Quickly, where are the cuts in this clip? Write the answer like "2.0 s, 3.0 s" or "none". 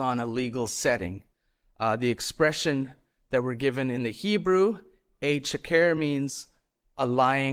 none